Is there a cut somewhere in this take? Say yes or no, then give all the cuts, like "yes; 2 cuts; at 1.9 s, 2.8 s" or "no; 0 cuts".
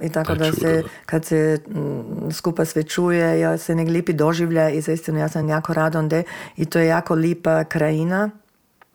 no; 0 cuts